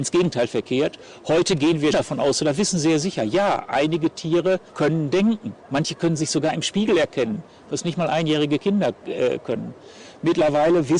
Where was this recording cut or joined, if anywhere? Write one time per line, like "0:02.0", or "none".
0:01.9
0:04.7
0:05.6